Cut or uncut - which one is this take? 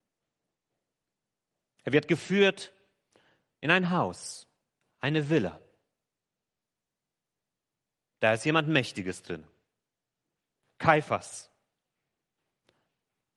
uncut